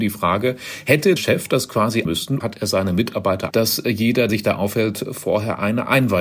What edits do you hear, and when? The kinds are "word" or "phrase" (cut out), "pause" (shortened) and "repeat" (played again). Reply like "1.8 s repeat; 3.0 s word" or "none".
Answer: 1.2 s word; 2.0 s word; 2.4 s word; 3.5 s word; 4.3 s word